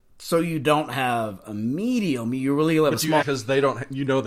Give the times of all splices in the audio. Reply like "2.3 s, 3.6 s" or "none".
3.2 s